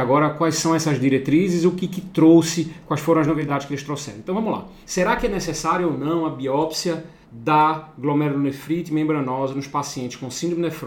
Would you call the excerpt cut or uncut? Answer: cut